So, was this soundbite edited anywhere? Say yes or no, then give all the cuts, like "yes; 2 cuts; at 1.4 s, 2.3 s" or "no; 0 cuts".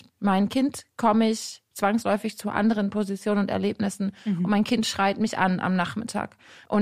no; 0 cuts